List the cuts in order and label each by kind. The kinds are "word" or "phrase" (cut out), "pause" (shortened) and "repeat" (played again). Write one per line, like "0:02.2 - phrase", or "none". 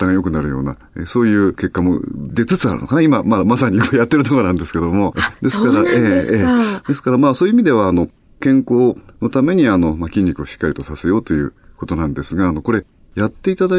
none